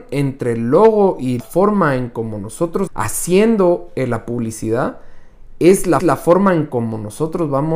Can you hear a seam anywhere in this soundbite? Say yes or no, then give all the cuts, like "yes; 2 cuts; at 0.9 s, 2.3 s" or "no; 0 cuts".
yes; 3 cuts; at 1.4 s, 2.9 s, 6.0 s